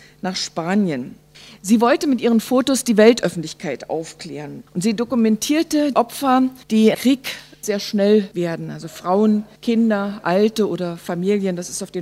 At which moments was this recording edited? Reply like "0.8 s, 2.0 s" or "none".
1.3 s, 4.7 s, 5.9 s, 6.6 s, 6.9 s, 7.6 s, 8.3 s, 9.6 s